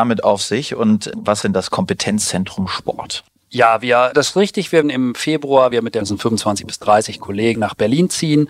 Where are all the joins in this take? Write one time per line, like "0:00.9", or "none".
0:01.4
0:04.1
0:04.8
0:05.7
0:06.0

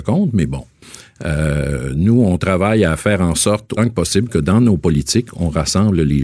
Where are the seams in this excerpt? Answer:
0:03.8

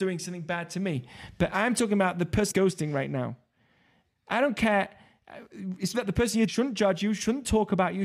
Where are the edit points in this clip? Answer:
0:02.5
0:05.9
0:06.5

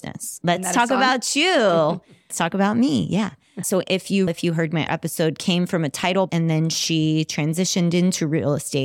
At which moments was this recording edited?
0:02.3
0:03.8
0:04.3
0:04.9
0:06.3

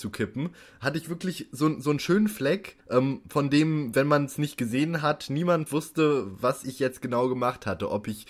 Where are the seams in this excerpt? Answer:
0:02.8

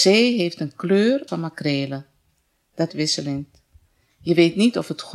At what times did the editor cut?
0:01.3
0:02.9

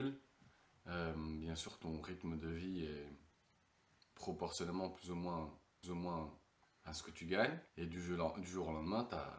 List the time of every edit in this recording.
0:05.8
0:07.7

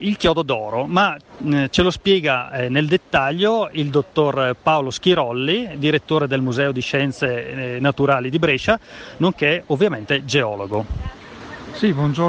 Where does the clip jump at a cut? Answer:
none

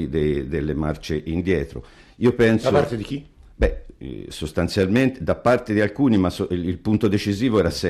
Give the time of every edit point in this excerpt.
none

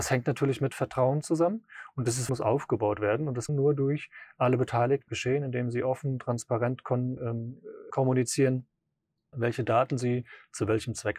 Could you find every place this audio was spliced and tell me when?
0:02.3
0:03.5
0:05.1
0:07.2
0:07.9
0:09.3

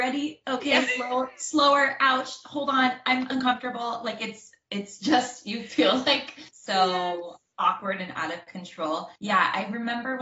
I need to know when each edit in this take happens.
0:06.5
0:09.2

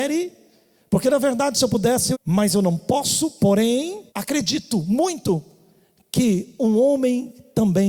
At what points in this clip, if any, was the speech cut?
0:02.1
0:04.1

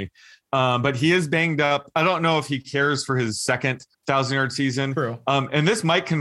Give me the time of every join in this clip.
0:03.9

